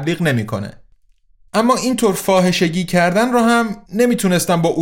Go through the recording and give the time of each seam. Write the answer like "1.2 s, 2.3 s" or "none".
3.8 s